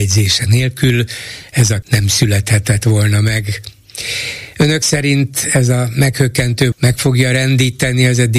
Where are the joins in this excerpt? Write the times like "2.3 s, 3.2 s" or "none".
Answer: 1.8 s, 6.7 s